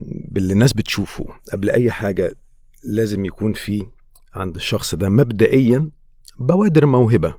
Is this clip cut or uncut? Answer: uncut